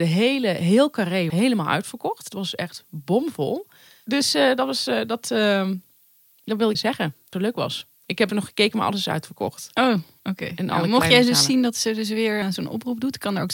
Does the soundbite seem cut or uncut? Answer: cut